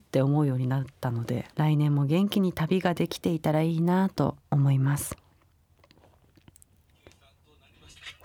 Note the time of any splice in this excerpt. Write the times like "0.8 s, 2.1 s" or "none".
1.5 s, 4.4 s